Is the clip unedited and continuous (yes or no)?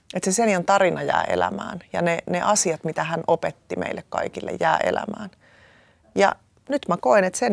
yes